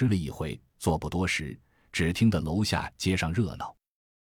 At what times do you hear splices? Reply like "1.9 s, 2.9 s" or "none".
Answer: none